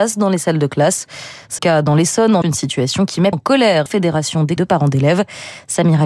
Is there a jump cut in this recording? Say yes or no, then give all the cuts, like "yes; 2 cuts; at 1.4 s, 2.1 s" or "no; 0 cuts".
yes; 5 cuts; at 1.6 s, 2.4 s, 3.3 s, 3.9 s, 4.6 s